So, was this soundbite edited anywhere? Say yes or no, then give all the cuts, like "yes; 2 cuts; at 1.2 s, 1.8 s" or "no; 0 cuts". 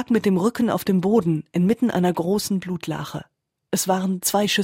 no; 0 cuts